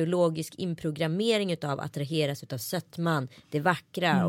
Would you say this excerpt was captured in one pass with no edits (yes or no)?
yes